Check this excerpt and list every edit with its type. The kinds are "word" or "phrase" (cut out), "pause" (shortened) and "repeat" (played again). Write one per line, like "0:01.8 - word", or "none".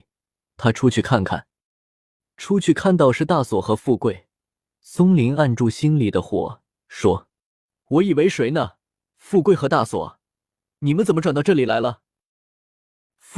none